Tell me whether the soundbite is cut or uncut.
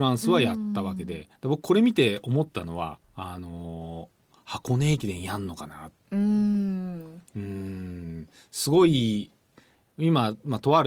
cut